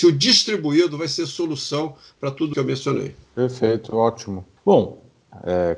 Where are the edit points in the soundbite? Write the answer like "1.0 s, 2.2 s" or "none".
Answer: 2.5 s, 3.2 s, 4.6 s